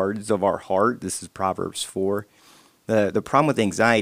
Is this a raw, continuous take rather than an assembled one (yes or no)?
yes